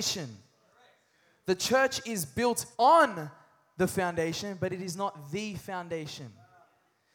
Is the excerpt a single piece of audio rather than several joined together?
no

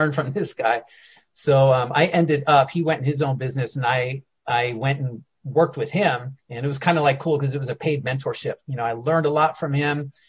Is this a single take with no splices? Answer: no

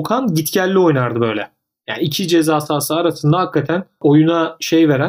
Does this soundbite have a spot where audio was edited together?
no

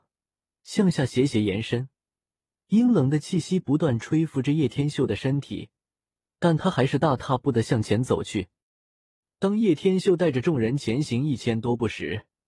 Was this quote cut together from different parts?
no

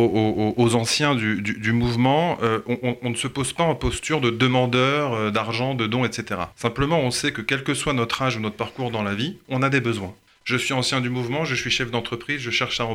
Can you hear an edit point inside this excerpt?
yes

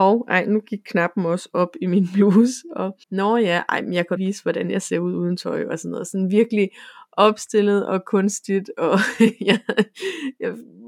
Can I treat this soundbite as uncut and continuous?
no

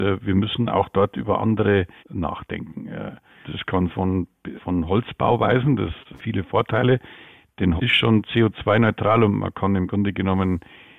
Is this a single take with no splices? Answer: no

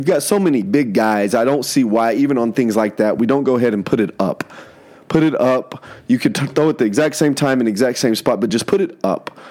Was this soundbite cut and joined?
no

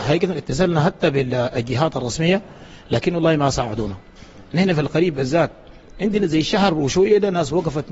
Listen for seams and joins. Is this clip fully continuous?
yes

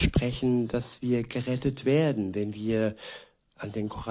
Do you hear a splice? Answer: no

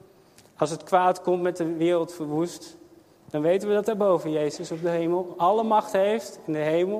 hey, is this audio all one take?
yes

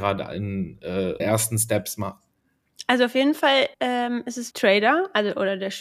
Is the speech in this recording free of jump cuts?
no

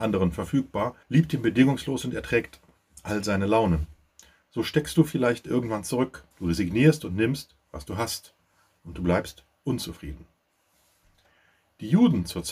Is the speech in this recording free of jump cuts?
no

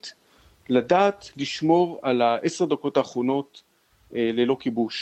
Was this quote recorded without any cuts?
yes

